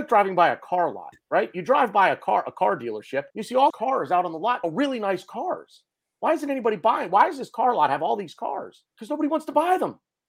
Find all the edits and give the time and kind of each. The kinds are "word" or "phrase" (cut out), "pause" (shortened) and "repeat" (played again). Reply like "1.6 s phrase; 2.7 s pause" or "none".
1.2 s pause; 3.3 s pause; 3.7 s word; 4.6 s phrase; 8.9 s pause